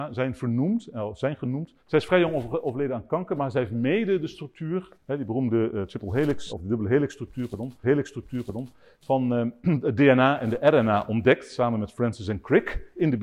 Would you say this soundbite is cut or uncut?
cut